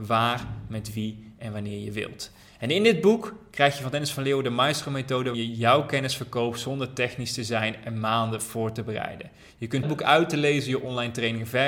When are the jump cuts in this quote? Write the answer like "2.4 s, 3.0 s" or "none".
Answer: 5.3 s, 9.8 s